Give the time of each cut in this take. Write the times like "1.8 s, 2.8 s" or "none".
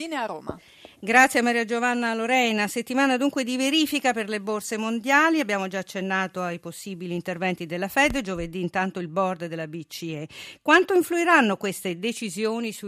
none